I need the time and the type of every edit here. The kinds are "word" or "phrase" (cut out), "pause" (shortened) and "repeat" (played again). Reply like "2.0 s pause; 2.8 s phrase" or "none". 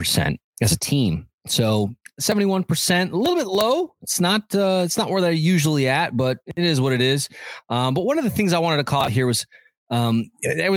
1.4 s pause

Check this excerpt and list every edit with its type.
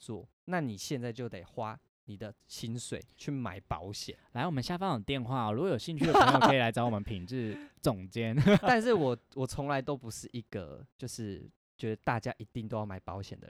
8.6 s word

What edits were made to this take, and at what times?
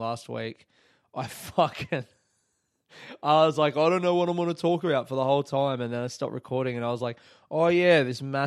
none

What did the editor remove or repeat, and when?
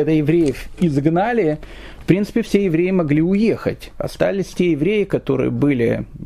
none

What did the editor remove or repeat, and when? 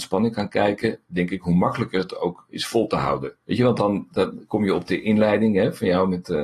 3.4 s pause

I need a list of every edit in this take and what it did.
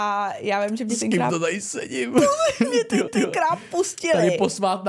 3.1 s repeat

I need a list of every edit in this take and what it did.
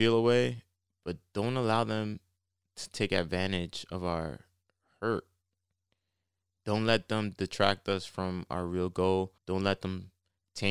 9.4 s pause

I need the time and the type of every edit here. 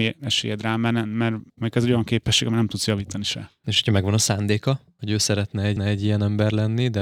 5.8 s repeat

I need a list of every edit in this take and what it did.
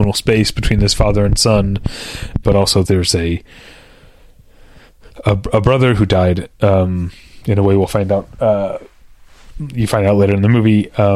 2.4 s word; 2.8 s phrase

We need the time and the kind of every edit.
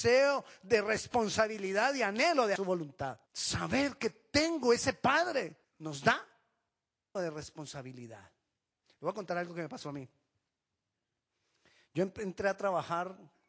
2.6 s word; 3.3 s pause; 5.6 s pause; 7.2 s word

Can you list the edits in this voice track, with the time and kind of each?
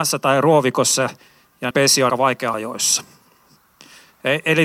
1.7 s word; 2.1 s word; 2.5 s word

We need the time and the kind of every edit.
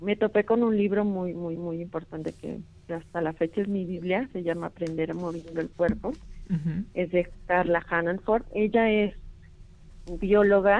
1.6 s repeat

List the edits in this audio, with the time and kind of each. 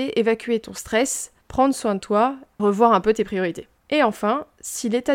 1.4 s pause; 2.6 s word; 3.8 s pause

